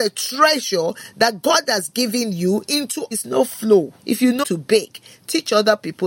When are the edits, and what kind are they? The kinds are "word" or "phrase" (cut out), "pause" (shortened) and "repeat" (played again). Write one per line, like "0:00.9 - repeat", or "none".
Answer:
0:03.1 - phrase
0:04.0 - pause
0:04.4 - word